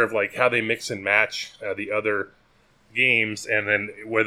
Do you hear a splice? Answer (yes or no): no